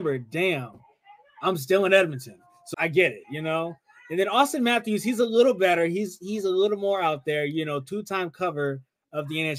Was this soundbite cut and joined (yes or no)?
yes